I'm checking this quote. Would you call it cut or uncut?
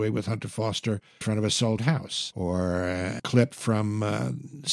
cut